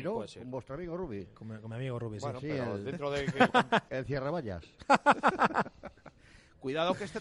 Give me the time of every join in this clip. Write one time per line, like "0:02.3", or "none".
0:03.9